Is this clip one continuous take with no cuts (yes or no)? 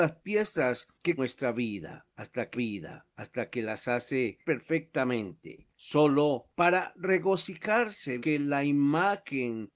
no